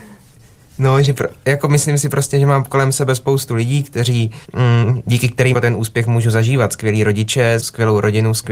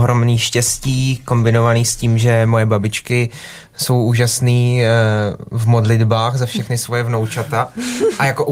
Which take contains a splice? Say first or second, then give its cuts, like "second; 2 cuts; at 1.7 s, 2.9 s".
first; 3 cuts; at 4.4 s, 5.5 s, 7.6 s